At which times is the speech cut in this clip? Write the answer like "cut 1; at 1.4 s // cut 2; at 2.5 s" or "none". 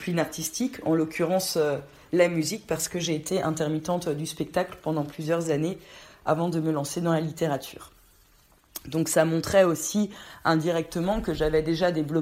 none